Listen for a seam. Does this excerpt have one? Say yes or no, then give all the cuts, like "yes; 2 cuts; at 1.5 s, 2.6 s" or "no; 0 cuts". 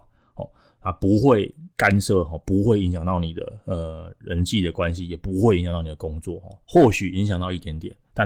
yes; 2 cuts; at 1.7 s, 6.6 s